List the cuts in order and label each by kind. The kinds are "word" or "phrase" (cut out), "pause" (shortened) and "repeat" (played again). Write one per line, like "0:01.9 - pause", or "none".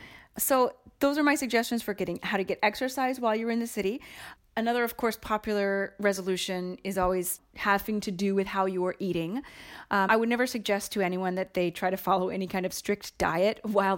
0:10.1 - word